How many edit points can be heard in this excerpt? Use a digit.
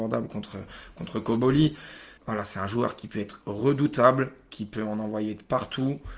1